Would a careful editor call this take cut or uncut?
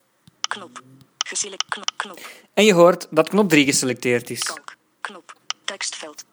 uncut